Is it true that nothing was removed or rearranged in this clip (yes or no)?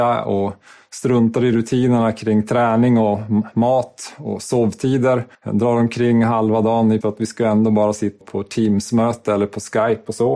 no